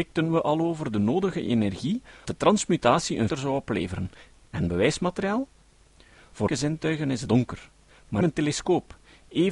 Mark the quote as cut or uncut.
cut